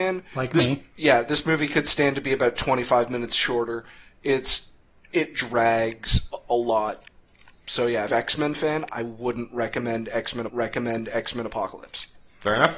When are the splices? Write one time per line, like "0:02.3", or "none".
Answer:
0:08.1
0:10.5